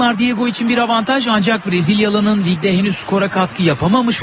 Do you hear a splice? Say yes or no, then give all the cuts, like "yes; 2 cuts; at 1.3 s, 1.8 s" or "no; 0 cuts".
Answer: no; 0 cuts